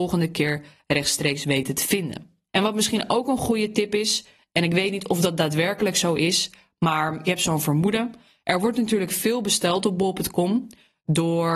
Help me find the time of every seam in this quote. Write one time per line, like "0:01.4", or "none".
none